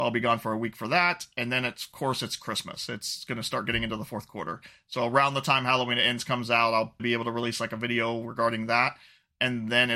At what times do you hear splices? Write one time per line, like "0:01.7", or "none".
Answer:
0:07.0